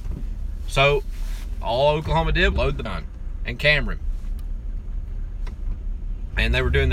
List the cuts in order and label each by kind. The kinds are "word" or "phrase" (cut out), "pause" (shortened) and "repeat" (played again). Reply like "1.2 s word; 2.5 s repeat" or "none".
2.5 s word; 2.9 s phrase